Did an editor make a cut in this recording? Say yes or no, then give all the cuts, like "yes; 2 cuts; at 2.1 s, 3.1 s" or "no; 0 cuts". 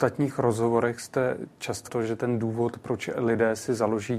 yes; 1 cut; at 1.9 s